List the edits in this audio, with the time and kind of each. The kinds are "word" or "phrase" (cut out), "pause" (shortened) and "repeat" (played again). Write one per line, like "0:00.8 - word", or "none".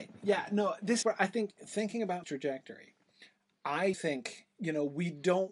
0:01.0 - word
0:02.2 - word
0:03.9 - word